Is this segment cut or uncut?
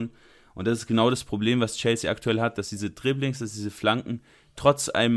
uncut